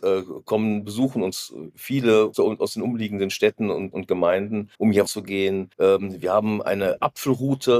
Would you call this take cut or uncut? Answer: cut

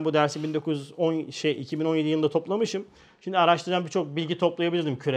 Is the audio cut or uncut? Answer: uncut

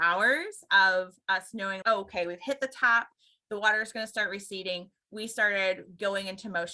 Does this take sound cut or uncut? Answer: cut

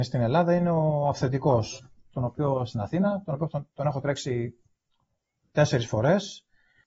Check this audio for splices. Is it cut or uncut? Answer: uncut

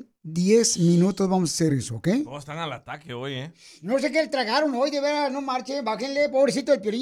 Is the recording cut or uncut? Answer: uncut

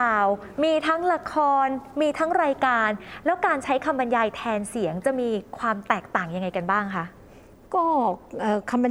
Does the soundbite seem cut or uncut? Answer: uncut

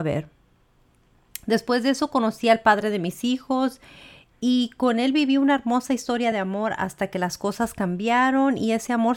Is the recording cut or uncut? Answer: uncut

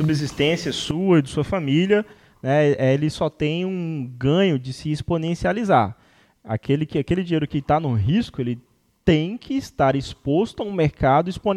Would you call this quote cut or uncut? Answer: uncut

